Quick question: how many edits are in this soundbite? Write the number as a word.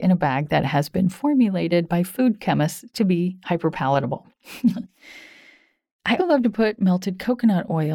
one